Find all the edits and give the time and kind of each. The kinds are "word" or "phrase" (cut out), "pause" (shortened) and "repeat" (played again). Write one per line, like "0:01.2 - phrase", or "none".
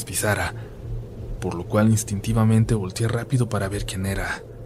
none